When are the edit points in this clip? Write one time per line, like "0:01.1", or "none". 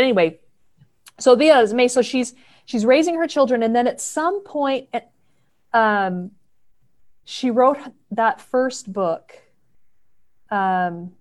none